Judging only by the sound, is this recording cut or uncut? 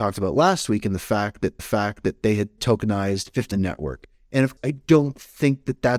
cut